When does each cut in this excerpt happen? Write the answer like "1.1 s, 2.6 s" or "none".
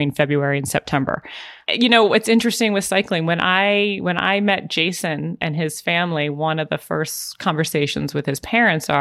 none